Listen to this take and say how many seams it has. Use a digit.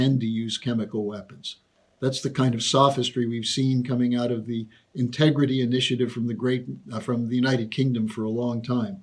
1